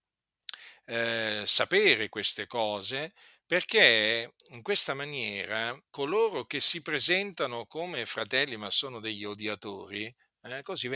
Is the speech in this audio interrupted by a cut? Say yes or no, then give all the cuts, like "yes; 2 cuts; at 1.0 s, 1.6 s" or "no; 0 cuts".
yes; 2 cuts; at 4.4 s, 5.9 s